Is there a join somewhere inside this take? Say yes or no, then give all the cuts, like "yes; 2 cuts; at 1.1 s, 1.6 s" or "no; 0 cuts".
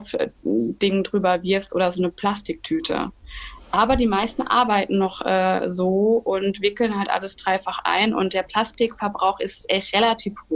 no; 0 cuts